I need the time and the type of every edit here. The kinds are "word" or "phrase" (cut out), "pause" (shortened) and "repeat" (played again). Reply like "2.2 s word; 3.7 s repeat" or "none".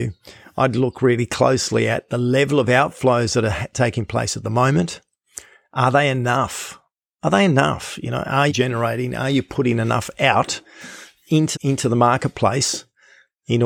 8.5 s word; 11.5 s word